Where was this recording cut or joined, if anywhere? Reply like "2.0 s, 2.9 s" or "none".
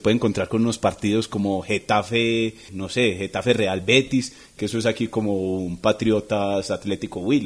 2.7 s